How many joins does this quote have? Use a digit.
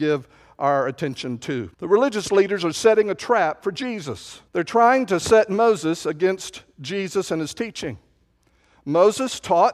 2